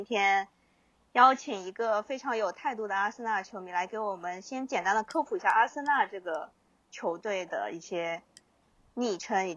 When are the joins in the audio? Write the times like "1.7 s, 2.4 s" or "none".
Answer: none

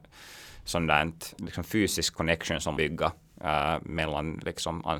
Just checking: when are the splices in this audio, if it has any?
1.4 s, 2.8 s

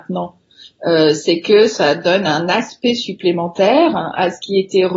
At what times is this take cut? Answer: none

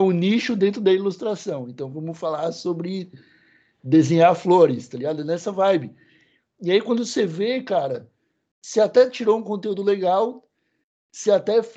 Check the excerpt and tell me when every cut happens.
none

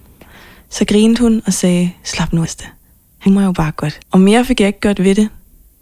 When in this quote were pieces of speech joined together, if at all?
2.4 s, 3.3 s, 4.0 s

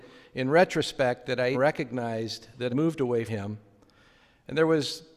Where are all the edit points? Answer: 1.5 s, 2.7 s, 3.3 s

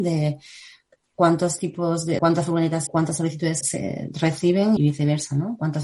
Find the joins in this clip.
2.2 s, 2.9 s, 3.6 s, 4.8 s

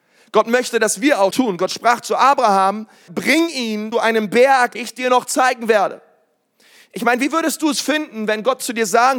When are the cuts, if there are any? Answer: 1.3 s, 3.1 s, 3.9 s, 4.7 s

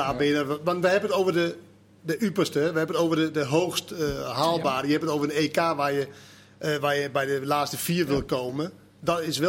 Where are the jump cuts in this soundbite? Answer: none

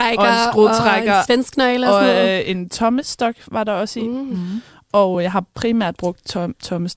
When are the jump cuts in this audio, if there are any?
none

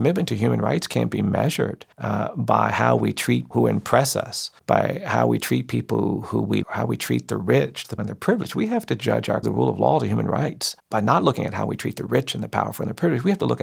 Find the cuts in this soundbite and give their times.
1.9 s, 3.5 s, 4.6 s, 6.6 s, 8.0 s, 9.4 s, 10.8 s

